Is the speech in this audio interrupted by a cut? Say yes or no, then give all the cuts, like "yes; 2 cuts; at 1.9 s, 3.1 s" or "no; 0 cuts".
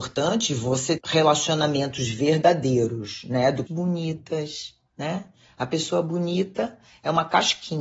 yes; 2 cuts; at 1.0 s, 3.7 s